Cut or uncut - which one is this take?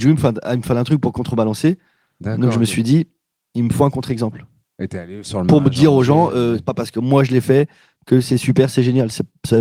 uncut